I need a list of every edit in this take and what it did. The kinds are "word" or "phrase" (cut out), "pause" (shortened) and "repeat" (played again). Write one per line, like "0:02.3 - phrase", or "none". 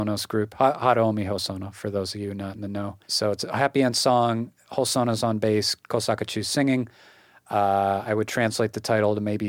0:03.0 - pause
0:05.8 - pause